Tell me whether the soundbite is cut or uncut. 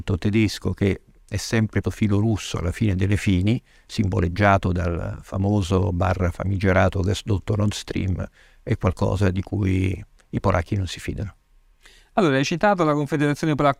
cut